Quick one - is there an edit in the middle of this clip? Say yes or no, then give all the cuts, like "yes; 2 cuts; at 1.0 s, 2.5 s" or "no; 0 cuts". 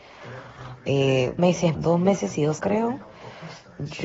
yes; 3 cuts; at 1.4 s, 1.7 s, 2.6 s